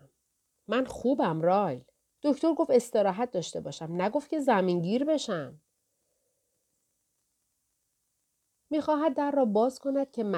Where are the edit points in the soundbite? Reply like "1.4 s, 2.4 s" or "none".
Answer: none